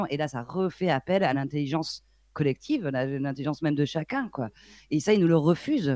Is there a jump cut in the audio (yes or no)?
no